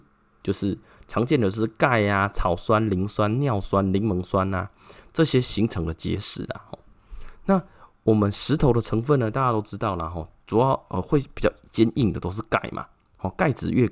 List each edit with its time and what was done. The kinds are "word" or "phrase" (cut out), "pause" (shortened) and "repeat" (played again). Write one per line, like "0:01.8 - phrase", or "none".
none